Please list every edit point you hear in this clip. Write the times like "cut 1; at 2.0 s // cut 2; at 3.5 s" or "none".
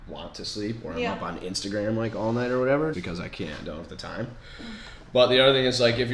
cut 1; at 2.9 s